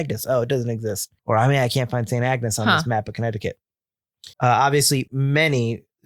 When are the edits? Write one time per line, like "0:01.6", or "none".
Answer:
0:01.2
0:04.3
0:05.1